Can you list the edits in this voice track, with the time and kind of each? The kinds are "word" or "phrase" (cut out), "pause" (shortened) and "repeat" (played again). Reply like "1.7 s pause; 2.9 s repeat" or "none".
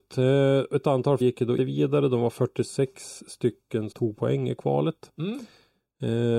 1.2 s word; 1.6 s word; 3.9 s word

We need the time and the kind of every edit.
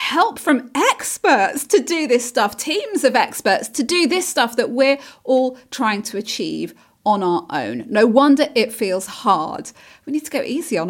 none

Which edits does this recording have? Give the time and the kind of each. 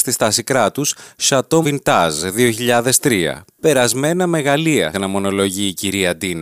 1.6 s word; 4.9 s word

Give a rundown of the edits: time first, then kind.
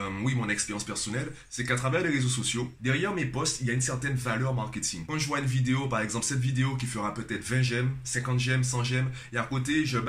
none

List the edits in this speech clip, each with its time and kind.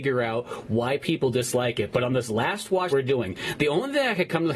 2.9 s word

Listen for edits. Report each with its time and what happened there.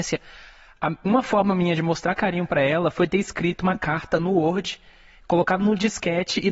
none

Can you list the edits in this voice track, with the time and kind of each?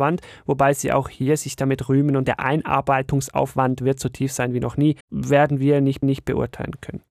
2.2 s word; 5.0 s pause; 6.0 s repeat

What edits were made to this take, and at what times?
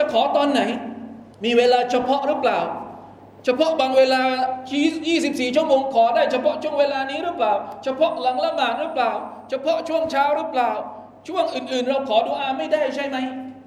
1.3 s pause

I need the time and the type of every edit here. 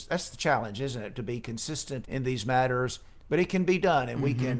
2.0 s word

